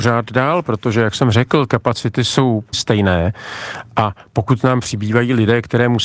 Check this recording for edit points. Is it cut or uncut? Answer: cut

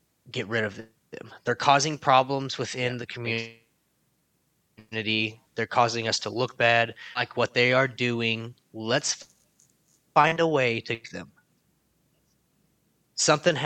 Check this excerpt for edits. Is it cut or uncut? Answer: uncut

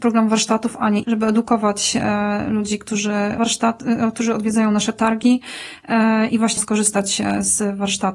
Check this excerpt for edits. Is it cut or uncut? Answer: cut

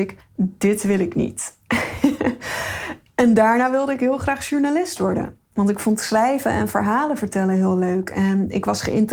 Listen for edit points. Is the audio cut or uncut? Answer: uncut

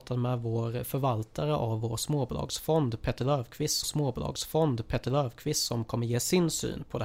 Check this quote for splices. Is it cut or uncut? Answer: cut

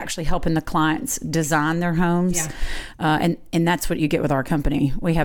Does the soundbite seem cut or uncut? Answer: uncut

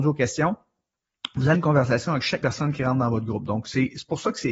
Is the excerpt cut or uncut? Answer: cut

